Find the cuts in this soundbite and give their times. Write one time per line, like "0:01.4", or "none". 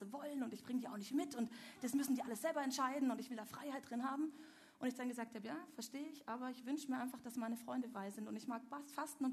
0:07.9